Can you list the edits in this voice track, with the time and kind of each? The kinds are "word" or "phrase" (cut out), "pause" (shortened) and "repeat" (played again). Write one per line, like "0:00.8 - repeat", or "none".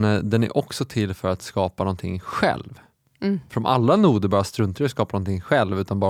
none